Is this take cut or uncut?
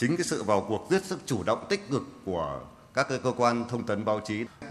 uncut